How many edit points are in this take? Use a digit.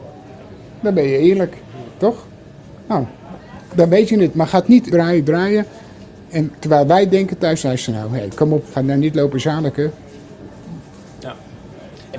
3